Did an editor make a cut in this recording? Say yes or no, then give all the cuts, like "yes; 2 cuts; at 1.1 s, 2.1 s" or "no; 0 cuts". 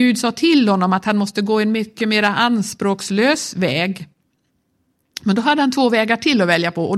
no; 0 cuts